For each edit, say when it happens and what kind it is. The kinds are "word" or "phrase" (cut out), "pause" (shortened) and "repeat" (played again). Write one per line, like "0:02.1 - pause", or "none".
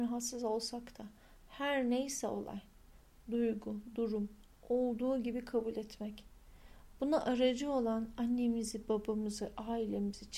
none